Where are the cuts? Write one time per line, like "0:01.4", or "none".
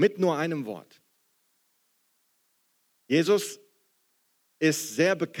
none